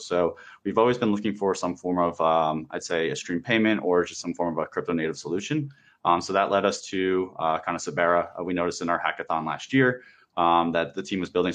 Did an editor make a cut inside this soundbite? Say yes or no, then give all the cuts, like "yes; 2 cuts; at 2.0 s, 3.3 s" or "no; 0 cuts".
no; 0 cuts